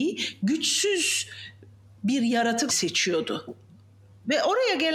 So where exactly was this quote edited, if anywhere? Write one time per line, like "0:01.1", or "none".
0:02.7